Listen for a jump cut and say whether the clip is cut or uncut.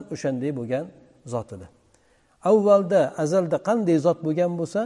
uncut